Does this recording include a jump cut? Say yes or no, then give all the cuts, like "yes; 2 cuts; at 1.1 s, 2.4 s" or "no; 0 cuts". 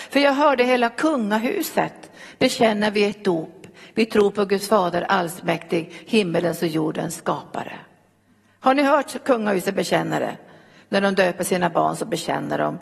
no; 0 cuts